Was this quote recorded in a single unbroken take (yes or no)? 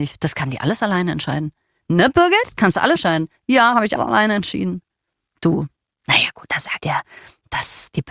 no